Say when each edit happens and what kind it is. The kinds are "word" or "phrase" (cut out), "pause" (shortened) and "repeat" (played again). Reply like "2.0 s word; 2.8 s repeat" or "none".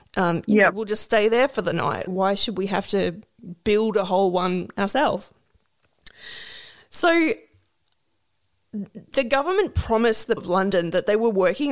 2.1 s word; 10.4 s word

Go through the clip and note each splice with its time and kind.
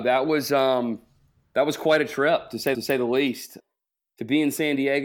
2.7 s repeat

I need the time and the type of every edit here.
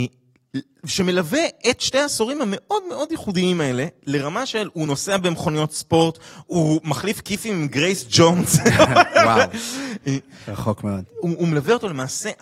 none

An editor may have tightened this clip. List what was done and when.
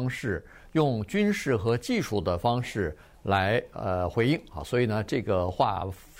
none

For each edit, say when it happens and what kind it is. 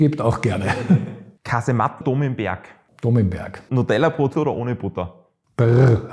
2.0 s word; 3.7 s word; 4.3 s word

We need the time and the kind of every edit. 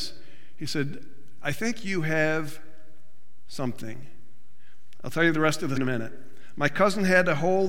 5.8 s word

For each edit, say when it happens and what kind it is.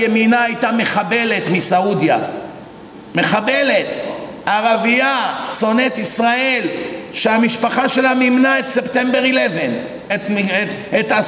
none

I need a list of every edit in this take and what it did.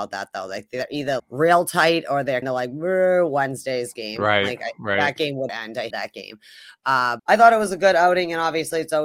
1.2 s word; 2.4 s word; 5.5 s word; 5.9 s word; 7.2 s word

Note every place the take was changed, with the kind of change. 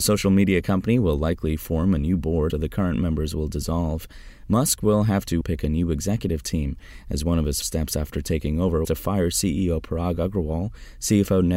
2.5 s word; 5.4 s word; 7.6 s word; 8.8 s word

